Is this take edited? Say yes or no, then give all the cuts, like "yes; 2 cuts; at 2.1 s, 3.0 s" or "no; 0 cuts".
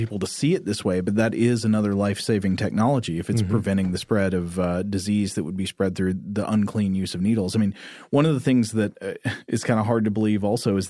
no; 0 cuts